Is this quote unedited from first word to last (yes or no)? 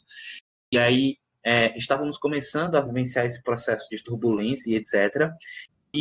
yes